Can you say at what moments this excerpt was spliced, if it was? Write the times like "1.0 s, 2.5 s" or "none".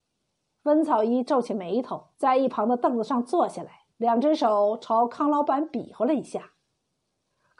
2.1 s, 3.9 s